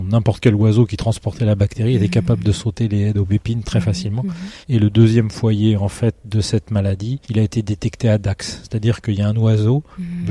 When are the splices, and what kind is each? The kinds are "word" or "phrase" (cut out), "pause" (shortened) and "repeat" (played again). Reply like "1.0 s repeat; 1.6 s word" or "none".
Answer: 4.6 s pause; 7.2 s pause